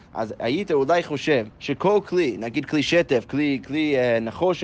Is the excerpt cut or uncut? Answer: cut